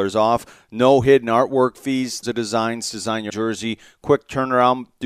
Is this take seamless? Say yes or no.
no